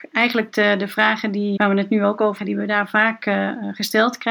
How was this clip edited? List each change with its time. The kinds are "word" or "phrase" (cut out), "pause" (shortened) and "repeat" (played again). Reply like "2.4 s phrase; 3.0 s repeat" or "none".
1.6 s word; 2.4 s phrase